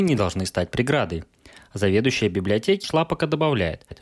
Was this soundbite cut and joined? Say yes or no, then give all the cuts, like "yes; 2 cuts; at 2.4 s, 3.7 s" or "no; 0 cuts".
yes; 1 cut; at 2.8 s